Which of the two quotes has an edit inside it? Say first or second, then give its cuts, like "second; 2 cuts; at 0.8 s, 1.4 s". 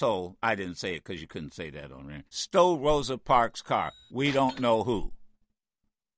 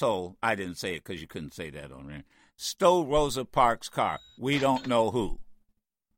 first; 1 cut; at 2.3 s